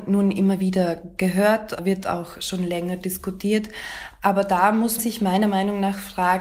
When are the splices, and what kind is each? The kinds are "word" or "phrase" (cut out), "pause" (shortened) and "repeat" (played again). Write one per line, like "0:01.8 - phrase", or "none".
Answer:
0:05.0 - word